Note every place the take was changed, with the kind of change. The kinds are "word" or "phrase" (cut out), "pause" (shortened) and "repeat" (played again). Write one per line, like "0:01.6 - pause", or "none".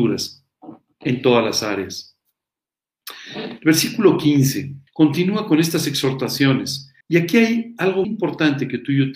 0:04.9 - pause
0:07.0 - pause
0:08.0 - word